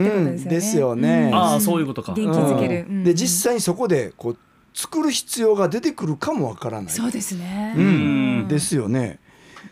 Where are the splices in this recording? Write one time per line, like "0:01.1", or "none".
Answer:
none